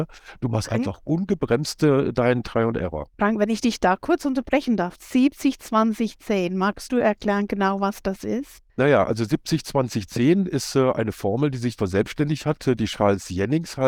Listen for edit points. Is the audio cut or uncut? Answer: cut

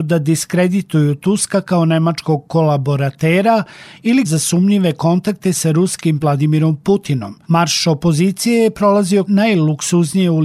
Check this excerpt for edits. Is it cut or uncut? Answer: cut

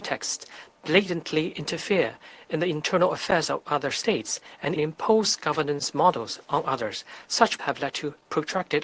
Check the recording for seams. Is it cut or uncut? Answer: cut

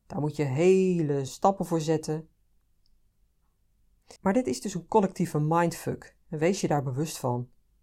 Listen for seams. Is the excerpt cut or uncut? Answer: cut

